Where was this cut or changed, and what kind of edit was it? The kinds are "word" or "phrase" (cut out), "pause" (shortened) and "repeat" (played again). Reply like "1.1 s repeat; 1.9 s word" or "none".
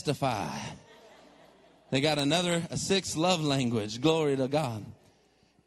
none